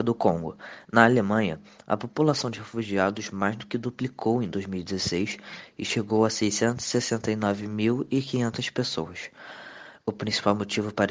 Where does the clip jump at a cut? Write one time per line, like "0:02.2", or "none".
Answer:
none